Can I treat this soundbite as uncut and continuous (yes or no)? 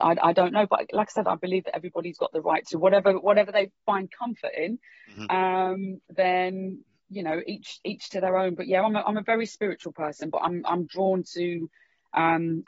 yes